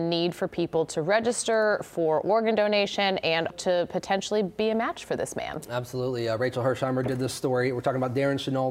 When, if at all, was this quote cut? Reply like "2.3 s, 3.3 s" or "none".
3.5 s